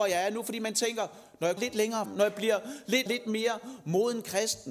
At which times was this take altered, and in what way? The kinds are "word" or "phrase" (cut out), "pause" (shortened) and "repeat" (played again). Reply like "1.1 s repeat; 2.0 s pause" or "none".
1.6 s word; 2.0 s word; 3.1 s phrase